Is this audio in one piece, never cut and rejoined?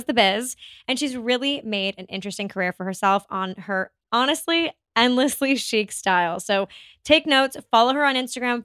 yes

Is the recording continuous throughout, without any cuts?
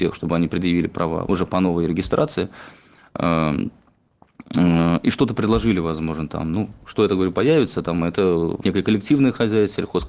no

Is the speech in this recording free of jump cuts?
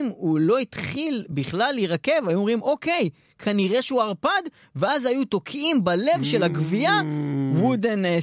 yes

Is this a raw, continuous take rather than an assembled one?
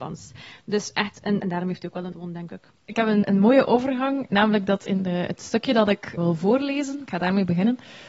no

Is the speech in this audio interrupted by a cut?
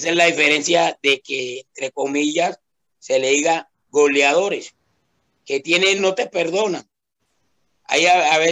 yes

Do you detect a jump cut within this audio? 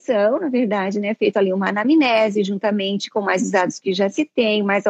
no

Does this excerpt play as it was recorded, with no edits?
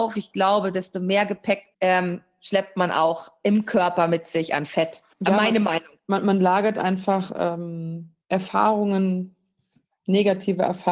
no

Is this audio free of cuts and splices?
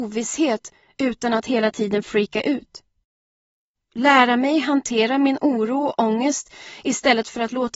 yes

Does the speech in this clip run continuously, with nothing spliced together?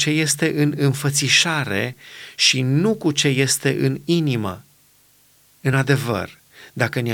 yes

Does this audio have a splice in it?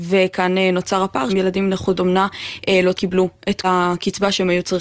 yes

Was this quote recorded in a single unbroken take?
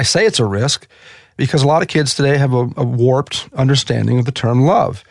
yes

